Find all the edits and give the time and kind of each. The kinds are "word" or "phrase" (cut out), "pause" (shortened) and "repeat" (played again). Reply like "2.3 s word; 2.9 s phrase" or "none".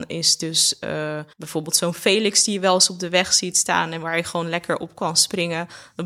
1.3 s pause